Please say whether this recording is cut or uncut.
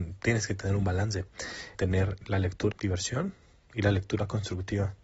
cut